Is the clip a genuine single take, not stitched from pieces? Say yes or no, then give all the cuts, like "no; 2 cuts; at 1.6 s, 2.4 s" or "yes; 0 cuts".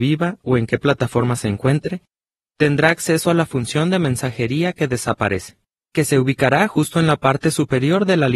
yes; 0 cuts